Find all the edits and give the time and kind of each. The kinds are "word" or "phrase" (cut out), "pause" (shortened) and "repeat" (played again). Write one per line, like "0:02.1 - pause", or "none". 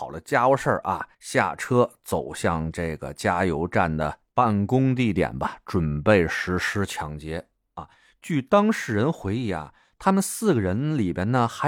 0:01.1 - pause